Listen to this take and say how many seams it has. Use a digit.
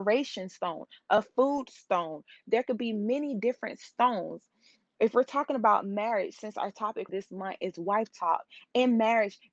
1